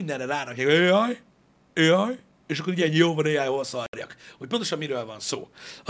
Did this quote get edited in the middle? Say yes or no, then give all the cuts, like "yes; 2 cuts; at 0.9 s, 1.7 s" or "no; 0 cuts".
no; 0 cuts